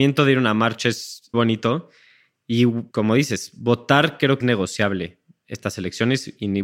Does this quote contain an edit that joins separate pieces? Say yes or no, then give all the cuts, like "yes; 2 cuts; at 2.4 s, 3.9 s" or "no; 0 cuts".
yes; 3 cuts; at 1.3 s, 2.9 s, 4.4 s